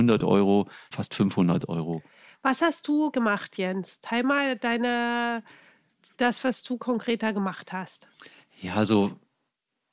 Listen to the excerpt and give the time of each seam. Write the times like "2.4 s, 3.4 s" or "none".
0.9 s, 3.1 s